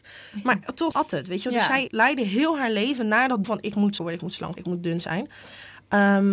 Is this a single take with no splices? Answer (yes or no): no